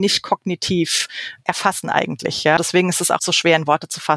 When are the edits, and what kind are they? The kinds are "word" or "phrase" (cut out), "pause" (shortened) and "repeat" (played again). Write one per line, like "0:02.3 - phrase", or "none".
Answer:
0:02.6 - word
0:03.2 - word